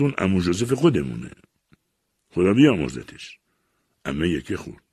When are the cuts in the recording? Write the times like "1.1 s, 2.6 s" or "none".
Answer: none

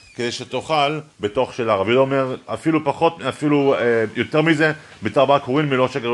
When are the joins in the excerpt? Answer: 1.1 s

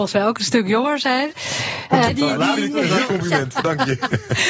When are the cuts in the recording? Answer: 2.1 s, 3.1 s

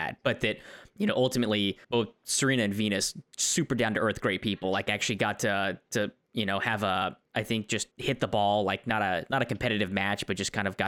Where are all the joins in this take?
1.8 s, 7.2 s, 7.9 s

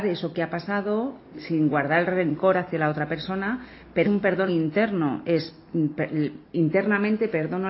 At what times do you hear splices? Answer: 1.3 s, 4.0 s, 4.5 s

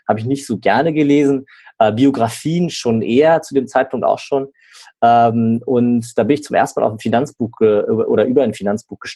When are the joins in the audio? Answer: none

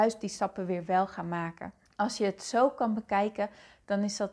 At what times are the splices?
1.9 s

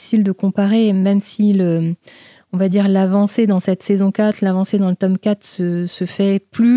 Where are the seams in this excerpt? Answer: none

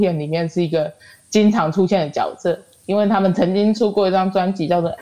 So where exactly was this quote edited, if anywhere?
none

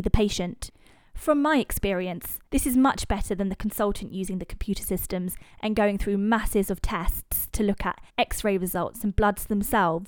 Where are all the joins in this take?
2.5 s, 8.1 s

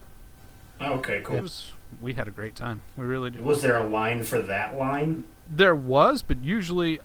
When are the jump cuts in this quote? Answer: 1.4 s

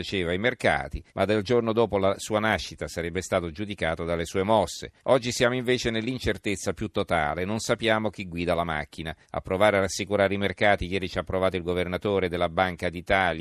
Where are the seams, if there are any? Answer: 1.1 s, 5.0 s, 9.2 s

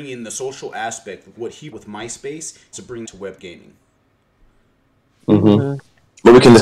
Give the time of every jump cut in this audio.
1.3 s, 1.7 s, 2.7 s, 3.0 s, 3.4 s

